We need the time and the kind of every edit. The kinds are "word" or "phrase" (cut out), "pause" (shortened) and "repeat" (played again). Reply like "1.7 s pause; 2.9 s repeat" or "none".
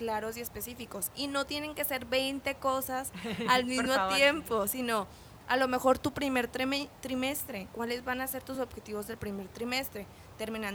none